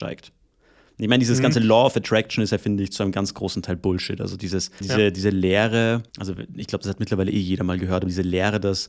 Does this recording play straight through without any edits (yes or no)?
no